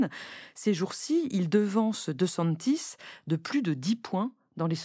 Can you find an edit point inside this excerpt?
no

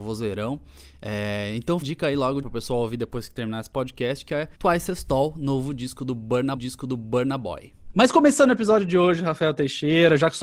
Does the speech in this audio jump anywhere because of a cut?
yes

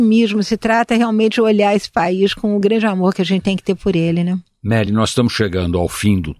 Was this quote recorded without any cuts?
yes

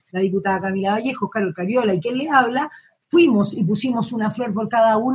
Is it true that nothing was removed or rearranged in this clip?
yes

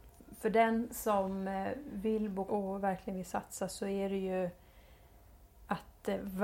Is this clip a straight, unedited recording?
no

